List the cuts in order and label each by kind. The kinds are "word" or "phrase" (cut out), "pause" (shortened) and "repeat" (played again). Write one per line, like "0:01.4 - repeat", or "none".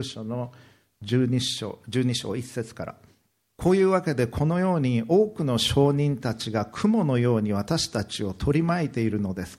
0:03.4 - pause